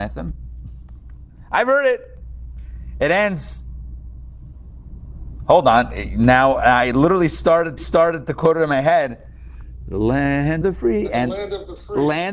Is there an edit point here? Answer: yes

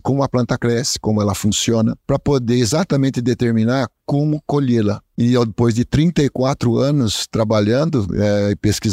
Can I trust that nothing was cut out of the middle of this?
no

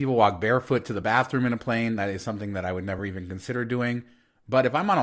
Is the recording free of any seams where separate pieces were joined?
yes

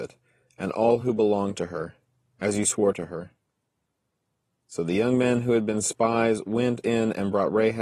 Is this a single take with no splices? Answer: yes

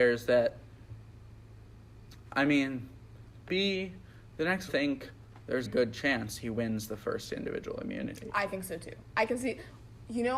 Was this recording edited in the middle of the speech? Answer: yes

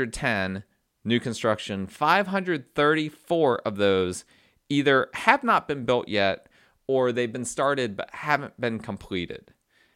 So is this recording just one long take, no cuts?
yes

